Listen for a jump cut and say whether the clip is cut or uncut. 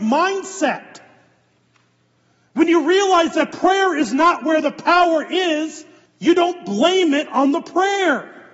cut